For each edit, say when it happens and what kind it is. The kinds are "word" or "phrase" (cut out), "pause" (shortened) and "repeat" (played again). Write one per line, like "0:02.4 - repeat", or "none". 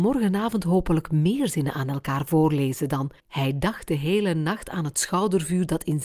0:03.2 - pause